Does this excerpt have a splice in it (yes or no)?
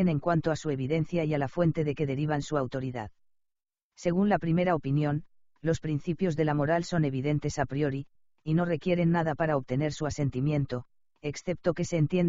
no